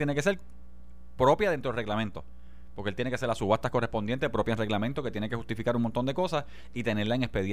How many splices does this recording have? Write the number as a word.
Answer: zero